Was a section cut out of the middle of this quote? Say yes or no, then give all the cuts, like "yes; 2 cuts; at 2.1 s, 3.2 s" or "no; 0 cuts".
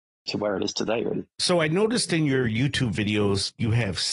no; 0 cuts